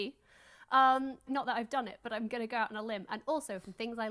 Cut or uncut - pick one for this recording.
cut